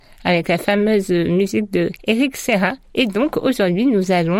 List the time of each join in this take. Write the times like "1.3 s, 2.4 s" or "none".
2.0 s, 2.8 s